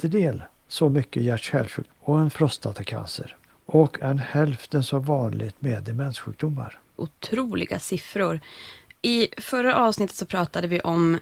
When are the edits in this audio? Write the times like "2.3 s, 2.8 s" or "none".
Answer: 1.9 s, 2.3 s, 4.0 s